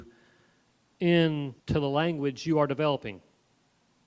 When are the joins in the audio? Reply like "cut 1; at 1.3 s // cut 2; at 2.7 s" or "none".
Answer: cut 1; at 1.6 s